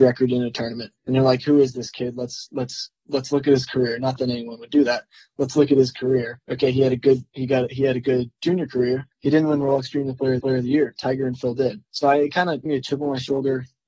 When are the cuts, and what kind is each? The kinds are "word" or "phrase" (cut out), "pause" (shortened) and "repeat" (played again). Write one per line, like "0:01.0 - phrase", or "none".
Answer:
0:01.0 - pause
0:03.0 - pause
0:06.4 - pause
0:09.1 - pause
0:10.4 - repeat
0:11.8 - pause
0:12.7 - phrase

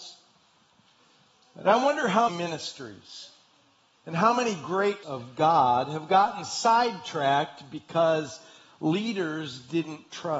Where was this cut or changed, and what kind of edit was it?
0:02.3 - word
0:05.0 - word

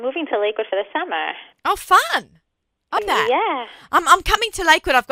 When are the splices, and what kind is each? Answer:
0:03.0 - word

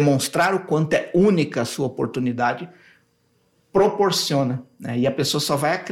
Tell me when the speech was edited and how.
none

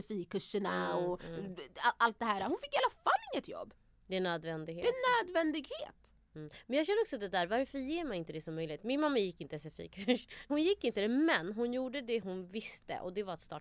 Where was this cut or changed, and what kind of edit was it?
none

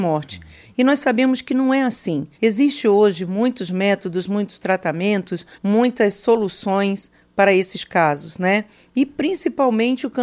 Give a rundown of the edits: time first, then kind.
0:02.3 - pause
0:05.5 - pause

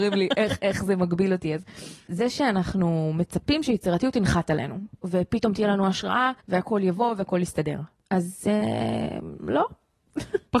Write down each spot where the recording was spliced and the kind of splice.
0:06.4 - pause

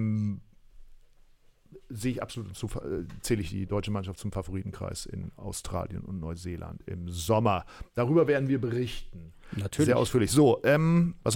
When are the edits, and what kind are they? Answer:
none

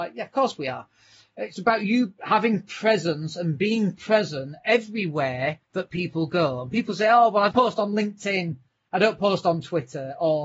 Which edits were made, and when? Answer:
0:05.6 - pause
0:07.5 - word

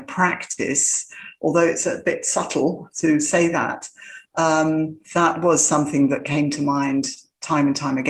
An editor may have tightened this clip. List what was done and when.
0:02.9 - word
0:05.0 - pause

